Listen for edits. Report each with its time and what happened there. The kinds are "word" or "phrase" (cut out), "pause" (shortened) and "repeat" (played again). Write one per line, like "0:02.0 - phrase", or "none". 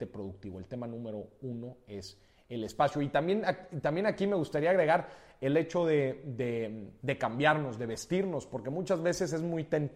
none